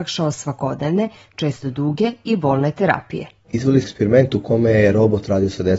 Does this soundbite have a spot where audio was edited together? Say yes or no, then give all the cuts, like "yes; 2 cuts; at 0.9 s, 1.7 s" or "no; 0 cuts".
yes; 1 cut; at 3.8 s